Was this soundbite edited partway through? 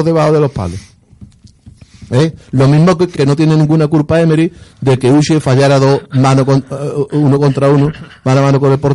yes; 1 cut; at 3.2 s

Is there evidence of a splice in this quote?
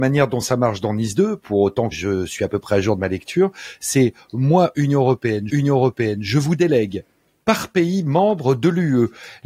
yes; 2 cuts; at 1.9 s, 5.5 s

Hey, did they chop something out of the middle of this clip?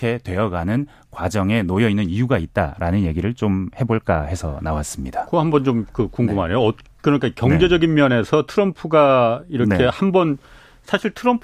no; 0 cuts

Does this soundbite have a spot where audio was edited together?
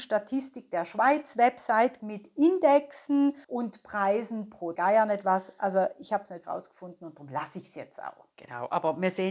yes; 4 cuts; at 2.0 s, 3.4 s, 4.8 s, 6.4 s

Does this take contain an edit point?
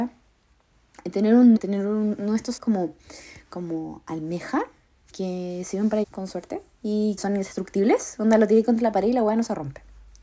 yes; 5 cuts; at 1.6 s, 2.6 s, 5.1 s, 6.0 s, 7.2 s

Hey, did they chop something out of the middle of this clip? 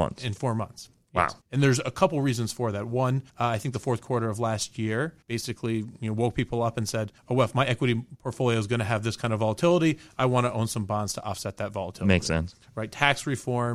yes; 4 cuts; at 1.4 s, 3.3 s, 5.2 s, 7.2 s

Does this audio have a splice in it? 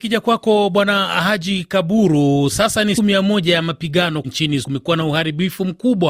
yes; 3 cuts; at 3.0 s, 4.2 s, 4.6 s

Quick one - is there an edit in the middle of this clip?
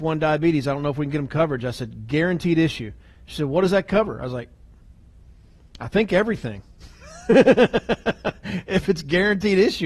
no; 0 cuts

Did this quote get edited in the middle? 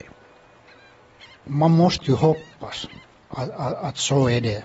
no; 0 cuts

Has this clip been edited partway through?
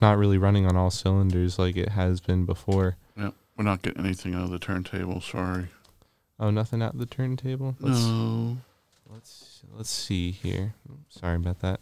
no; 0 cuts

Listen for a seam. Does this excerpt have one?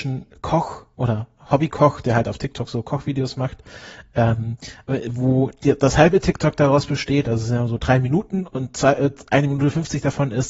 no; 0 cuts

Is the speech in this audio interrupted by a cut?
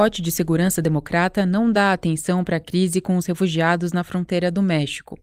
no; 0 cuts

